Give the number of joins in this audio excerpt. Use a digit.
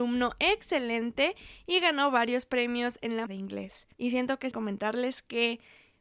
3